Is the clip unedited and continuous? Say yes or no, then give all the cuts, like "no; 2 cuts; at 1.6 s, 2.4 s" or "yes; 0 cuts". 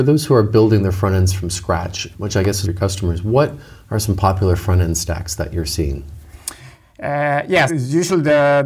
no; 3 cuts; at 2.1 s, 2.6 s, 7.7 s